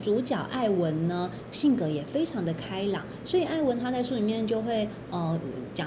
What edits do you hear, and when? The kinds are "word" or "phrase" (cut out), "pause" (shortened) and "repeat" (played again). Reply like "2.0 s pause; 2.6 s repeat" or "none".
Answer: 1.5 s word